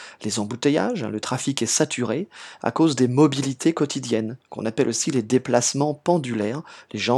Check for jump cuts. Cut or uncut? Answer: uncut